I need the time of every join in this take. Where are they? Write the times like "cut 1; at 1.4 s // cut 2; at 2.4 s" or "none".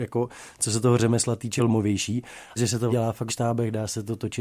cut 1; at 1.6 s // cut 2; at 2.6 s // cut 3; at 2.9 s // cut 4; at 3.3 s